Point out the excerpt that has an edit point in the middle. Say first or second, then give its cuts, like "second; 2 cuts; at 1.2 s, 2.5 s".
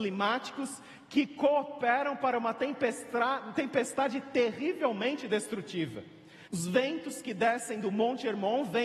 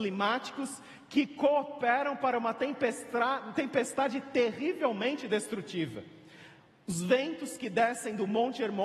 first; 1 cut; at 6.5 s